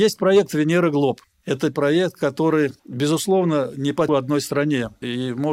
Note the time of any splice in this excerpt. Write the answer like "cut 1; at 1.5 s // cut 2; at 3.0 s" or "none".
cut 1; at 1.7 s // cut 2; at 2.8 s // cut 3; at 4.1 s